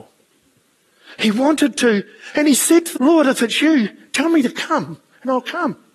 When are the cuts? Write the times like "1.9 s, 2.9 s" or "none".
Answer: 3.0 s